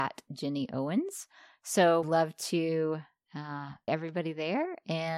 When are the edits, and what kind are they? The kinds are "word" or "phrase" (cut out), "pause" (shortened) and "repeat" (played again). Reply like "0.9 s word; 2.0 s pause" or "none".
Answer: 2.0 s word; 3.9 s word